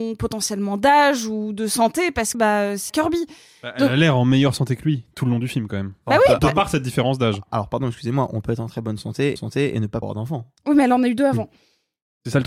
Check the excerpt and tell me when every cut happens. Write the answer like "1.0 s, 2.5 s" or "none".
2.3 s, 2.9 s, 6.4 s, 9.4 s, 10.0 s